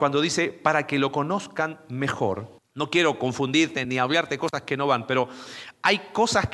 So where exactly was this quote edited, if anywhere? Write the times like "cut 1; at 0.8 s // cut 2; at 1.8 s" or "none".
cut 1; at 2.6 s // cut 2; at 3.8 s